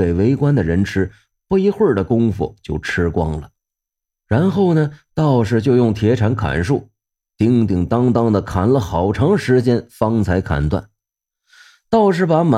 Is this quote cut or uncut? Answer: uncut